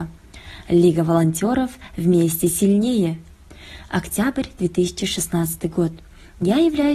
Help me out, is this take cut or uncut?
uncut